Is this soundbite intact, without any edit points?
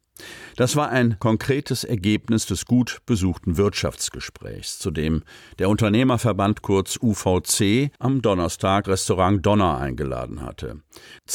no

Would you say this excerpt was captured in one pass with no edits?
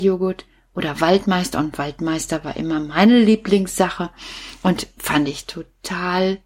yes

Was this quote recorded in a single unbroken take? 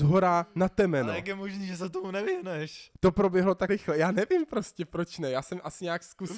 no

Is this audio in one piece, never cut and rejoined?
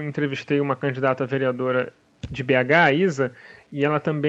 yes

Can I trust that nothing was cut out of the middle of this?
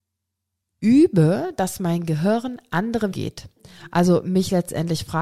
no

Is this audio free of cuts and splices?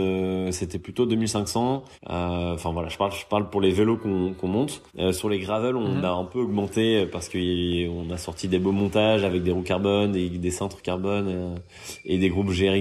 no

